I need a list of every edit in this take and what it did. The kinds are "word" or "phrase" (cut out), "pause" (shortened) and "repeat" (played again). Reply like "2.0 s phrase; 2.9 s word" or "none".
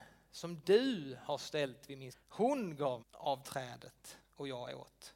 2.1 s word; 3.0 s word